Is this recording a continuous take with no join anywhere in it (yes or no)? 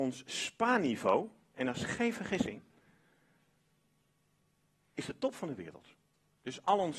yes